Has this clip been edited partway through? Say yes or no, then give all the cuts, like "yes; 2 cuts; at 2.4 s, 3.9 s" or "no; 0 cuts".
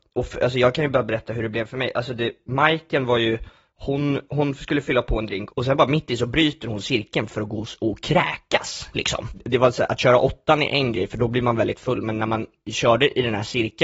no; 0 cuts